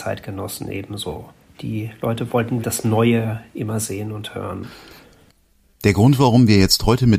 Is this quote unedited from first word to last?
no; 1 cut; at 2.6 s

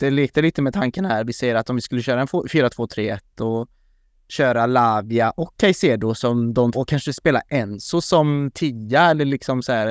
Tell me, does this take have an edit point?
yes; 1 cut; at 6.7 s

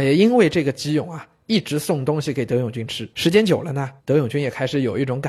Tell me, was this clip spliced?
yes; 2 cuts; at 3.1 s, 4.0 s

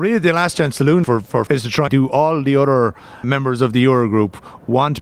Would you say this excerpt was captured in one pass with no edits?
no; 4 cuts; at 1.0 s, 1.5 s, 1.9 s, 3.2 s

